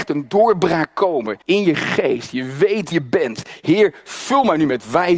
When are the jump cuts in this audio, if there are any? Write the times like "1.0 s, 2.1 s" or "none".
1.4 s, 2.9 s